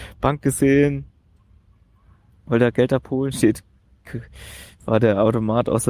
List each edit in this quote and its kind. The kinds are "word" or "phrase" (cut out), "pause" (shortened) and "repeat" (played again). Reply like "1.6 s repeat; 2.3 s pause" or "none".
none